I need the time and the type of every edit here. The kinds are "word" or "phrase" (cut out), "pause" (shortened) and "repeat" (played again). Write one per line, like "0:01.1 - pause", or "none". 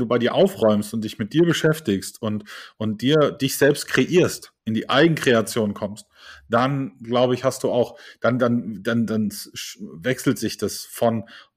0:04.6 - pause